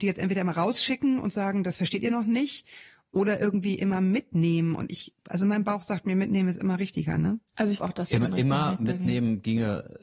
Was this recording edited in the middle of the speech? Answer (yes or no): yes